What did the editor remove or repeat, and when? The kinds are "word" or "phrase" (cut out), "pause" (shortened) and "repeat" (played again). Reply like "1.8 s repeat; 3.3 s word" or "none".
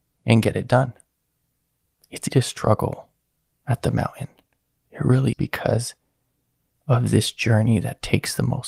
2.3 s word; 5.3 s word; 6.7 s phrase